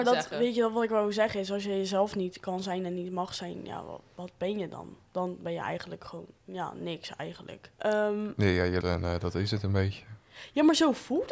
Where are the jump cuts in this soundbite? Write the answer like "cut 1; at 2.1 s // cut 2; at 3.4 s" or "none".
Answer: cut 1; at 5.1 s // cut 2; at 7.7 s // cut 3; at 8.8 s